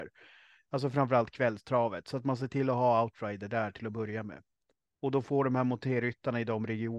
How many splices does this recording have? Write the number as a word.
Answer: zero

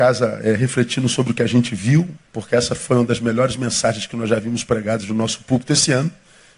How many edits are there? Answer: one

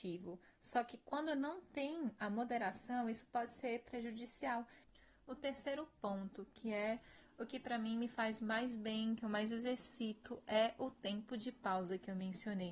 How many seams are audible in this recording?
zero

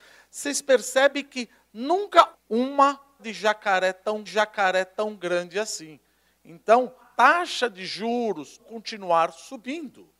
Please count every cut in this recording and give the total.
five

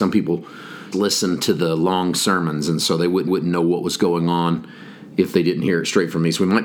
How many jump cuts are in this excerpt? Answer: two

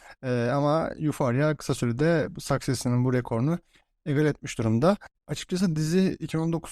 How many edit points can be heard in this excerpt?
one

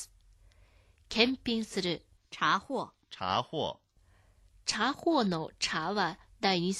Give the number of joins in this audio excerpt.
one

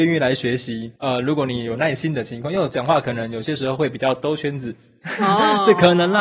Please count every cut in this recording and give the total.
one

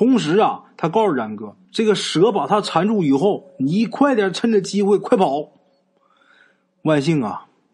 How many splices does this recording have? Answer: one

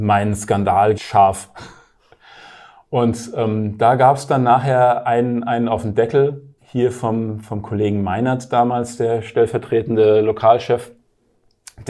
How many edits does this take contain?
two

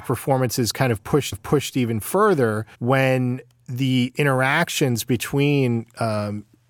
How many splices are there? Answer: two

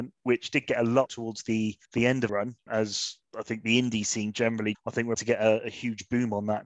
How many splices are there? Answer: six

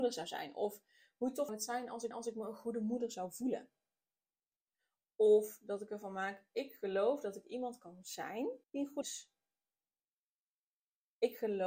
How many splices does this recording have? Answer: four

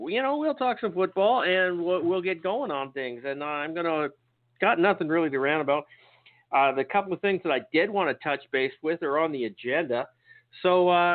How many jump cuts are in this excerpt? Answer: zero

